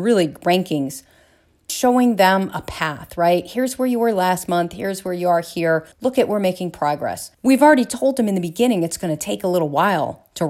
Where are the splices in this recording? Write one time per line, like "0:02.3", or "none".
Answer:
0:01.7
0:05.9
0:07.3